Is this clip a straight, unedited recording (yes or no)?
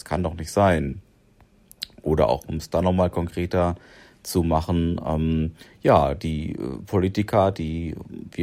yes